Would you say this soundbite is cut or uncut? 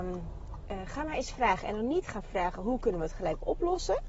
uncut